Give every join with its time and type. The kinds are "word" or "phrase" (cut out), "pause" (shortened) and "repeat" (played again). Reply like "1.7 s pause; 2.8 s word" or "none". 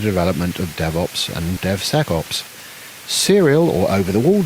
1.6 s word